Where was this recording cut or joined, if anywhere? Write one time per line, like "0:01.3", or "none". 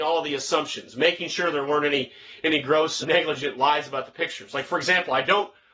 0:03.0